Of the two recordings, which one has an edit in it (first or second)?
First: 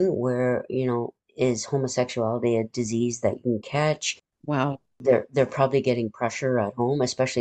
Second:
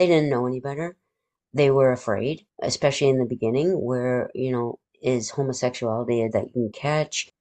second